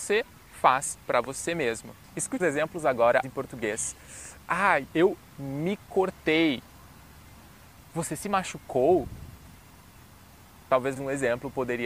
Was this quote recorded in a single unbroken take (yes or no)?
no